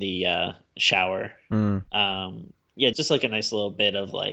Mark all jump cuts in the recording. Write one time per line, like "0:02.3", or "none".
0:01.9
0:02.9